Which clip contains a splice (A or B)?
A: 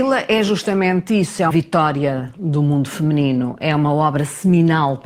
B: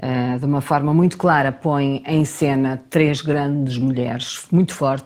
A